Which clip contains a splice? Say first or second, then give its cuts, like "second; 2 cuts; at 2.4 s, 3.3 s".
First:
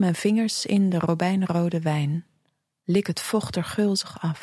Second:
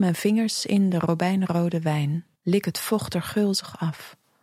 second; 1 cut; at 2.4 s